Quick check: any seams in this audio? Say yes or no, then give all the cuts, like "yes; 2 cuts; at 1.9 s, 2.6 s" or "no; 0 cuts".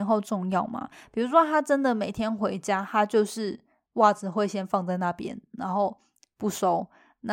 no; 0 cuts